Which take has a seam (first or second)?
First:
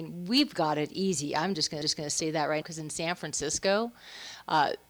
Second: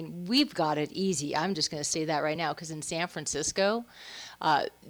first